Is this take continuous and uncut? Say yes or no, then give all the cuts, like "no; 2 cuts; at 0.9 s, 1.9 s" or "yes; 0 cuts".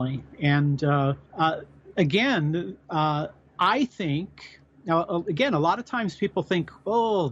no; 1 cut; at 1.3 s